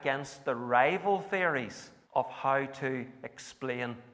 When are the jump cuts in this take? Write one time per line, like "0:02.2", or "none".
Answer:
0:02.0

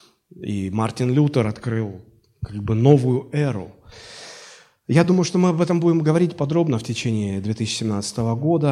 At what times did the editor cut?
none

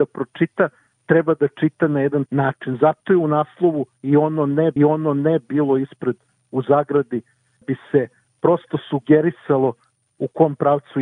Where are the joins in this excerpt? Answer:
0:02.3
0:04.8
0:07.6

